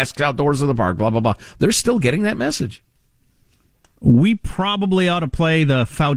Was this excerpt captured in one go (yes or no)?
yes